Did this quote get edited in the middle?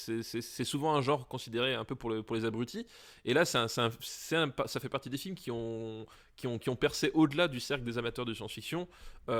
no; 0 cuts

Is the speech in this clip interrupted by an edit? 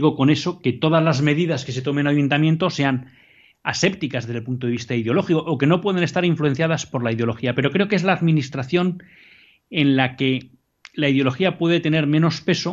no; 0 cuts

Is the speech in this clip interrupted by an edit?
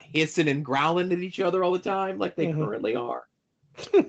no; 0 cuts

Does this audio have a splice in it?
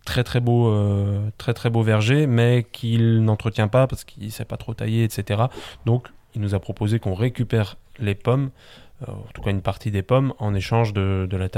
no; 0 cuts

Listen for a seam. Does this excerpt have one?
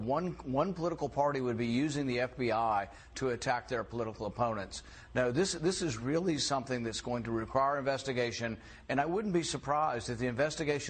no; 0 cuts

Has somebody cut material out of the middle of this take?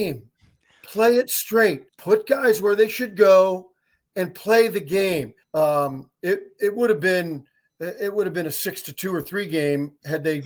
yes; 2 cuts; at 1.9 s, 5.4 s

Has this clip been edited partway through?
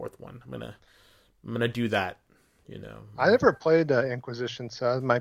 no; 0 cuts

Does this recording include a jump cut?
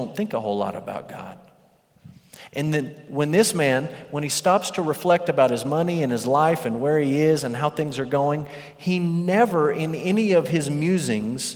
no; 0 cuts

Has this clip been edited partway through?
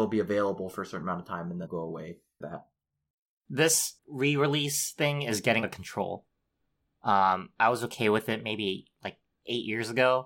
yes; 4 cuts; at 1.7 s, 2.4 s, 4.0 s, 5.6 s

